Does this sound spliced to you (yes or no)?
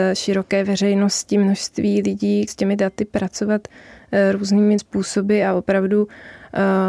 yes